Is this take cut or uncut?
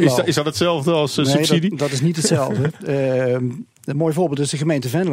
uncut